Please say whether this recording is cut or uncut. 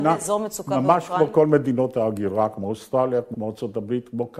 cut